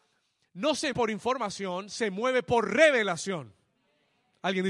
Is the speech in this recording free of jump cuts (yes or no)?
no